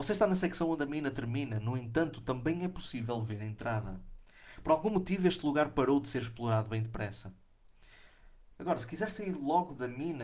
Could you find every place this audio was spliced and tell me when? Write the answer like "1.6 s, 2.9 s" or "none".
none

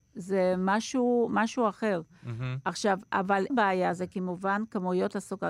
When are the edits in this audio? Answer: 3.5 s

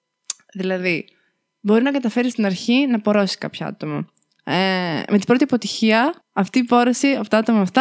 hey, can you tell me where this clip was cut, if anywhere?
6.2 s

